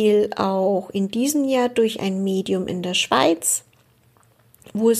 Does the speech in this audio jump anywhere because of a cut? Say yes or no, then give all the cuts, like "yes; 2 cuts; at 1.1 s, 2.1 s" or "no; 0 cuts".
no; 0 cuts